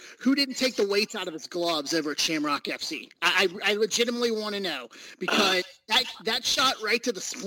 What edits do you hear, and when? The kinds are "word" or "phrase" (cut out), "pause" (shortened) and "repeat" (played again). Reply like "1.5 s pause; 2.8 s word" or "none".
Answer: none